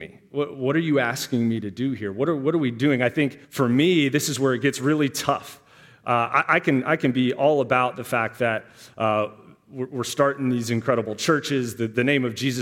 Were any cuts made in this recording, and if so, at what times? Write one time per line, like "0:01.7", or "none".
0:03.4